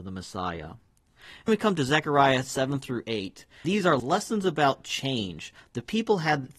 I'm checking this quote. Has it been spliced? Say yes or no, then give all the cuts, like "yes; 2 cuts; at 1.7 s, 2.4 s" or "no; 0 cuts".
yes; 3 cuts; at 1.5 s, 3.6 s, 4.0 s